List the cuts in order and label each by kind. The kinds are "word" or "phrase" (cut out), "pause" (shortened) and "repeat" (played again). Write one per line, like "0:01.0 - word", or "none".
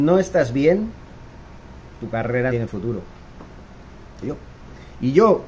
0:02.5 - word
0:04.2 - phrase